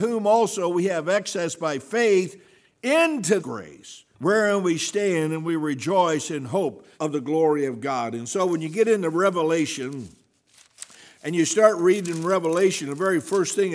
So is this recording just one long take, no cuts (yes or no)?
no